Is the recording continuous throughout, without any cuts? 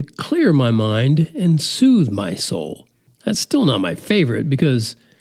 yes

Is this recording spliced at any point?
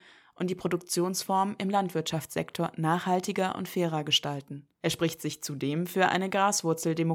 yes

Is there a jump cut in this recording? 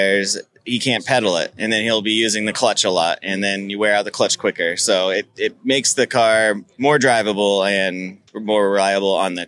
yes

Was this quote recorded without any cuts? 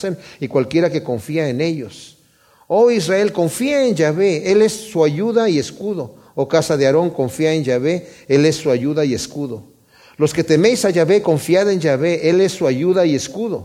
yes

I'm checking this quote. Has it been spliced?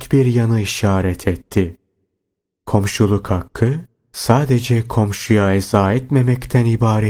no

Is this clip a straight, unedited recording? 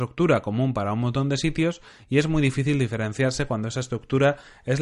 yes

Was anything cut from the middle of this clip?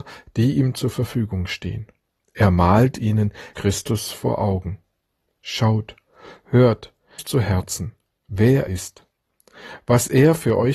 yes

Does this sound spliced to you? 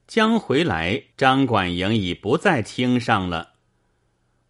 yes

